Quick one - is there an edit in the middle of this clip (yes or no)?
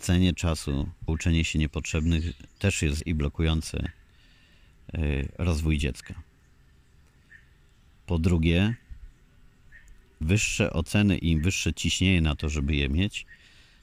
yes